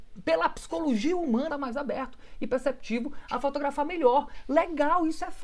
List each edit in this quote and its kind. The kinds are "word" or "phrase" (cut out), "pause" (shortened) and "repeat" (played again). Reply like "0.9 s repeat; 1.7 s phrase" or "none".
1.5 s phrase